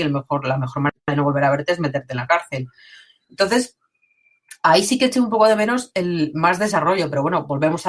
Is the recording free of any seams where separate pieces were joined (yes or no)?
yes